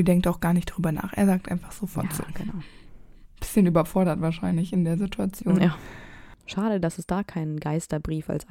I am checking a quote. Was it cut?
yes; 2 cuts; at 3.3 s, 6.4 s

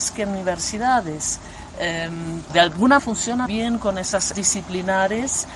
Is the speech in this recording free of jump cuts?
no; 4 cuts; at 2.5 s, 3.0 s, 3.5 s, 4.3 s

